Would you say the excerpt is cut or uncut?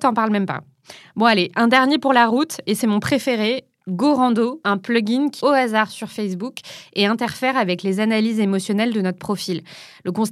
cut